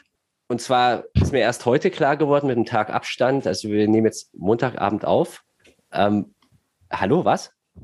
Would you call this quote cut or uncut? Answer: uncut